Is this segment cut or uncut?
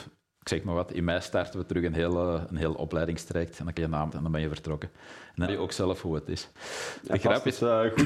cut